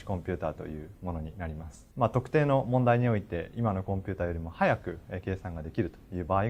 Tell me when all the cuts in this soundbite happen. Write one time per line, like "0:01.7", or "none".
0:01.9